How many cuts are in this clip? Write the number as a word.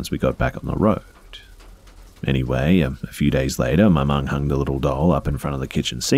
zero